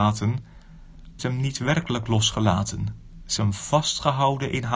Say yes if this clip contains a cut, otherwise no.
yes